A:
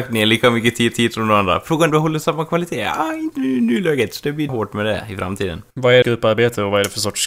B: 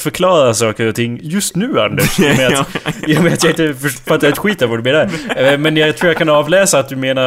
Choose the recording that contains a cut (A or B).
A